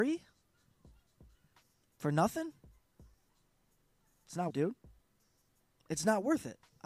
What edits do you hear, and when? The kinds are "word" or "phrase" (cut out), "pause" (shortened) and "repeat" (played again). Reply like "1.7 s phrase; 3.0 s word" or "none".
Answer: 4.5 s phrase